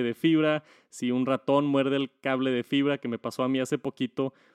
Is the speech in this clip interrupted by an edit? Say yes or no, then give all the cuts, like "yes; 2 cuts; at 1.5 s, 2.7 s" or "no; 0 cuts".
no; 0 cuts